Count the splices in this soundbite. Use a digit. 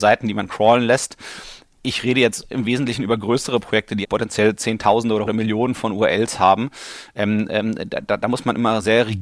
2